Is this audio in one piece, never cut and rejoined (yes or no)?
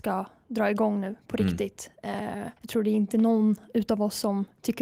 no